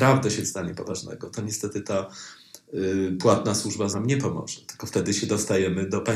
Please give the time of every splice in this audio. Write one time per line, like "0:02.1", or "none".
0:03.9